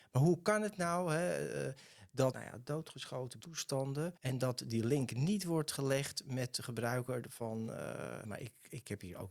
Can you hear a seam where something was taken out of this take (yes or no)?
yes